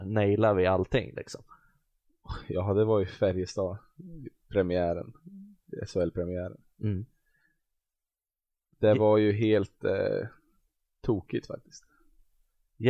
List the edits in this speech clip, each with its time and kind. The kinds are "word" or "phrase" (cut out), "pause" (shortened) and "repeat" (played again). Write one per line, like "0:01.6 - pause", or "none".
none